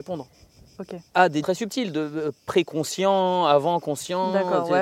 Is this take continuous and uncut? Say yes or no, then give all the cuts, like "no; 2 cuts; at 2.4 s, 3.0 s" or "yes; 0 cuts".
no; 2 cuts; at 1.1 s, 1.4 s